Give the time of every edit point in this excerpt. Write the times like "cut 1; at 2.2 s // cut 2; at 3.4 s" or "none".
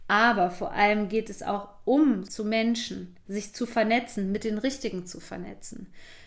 cut 1; at 2.3 s

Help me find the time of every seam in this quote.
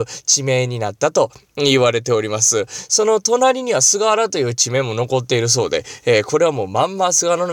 none

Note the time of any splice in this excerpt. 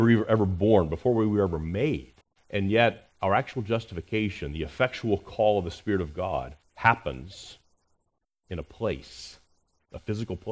cut 1; at 2.2 s // cut 2; at 3.1 s // cut 3; at 6.7 s

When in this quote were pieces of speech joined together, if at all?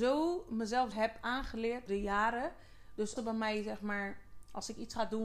cut 1; at 0.9 s // cut 2; at 1.9 s // cut 3; at 3.2 s

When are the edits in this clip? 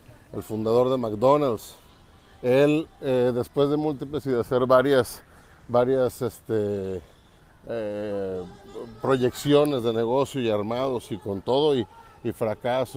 cut 1; at 4.2 s

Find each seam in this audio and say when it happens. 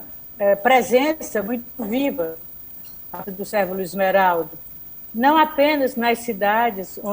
cut 1; at 3.2 s

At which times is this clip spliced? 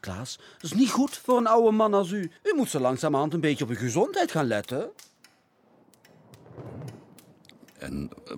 cut 1; at 2.4 s

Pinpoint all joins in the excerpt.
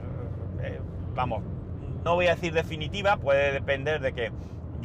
cut 1; at 2.1 s // cut 2; at 3.2 s

